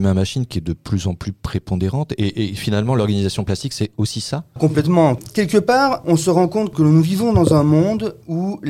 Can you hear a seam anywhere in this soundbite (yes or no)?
yes